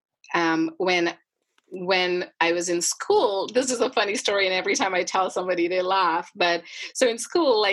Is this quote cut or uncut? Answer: uncut